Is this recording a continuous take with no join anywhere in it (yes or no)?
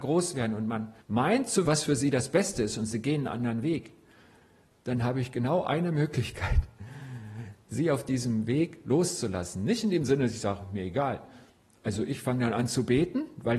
no